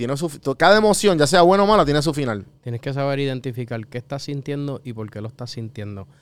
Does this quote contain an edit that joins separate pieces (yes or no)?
no